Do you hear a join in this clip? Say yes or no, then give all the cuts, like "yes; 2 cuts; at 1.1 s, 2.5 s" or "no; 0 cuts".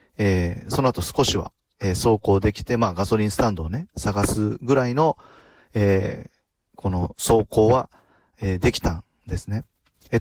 no; 0 cuts